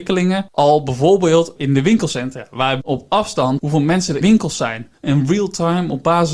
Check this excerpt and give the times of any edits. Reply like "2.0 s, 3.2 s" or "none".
2.8 s, 3.6 s, 4.2 s